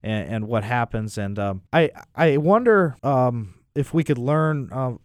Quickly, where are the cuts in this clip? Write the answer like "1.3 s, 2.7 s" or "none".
1.7 s, 3.0 s